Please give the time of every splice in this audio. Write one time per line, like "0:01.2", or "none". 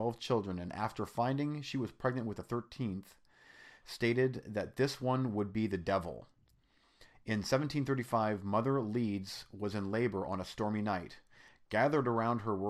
none